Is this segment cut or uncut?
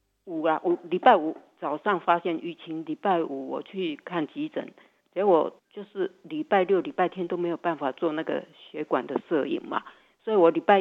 cut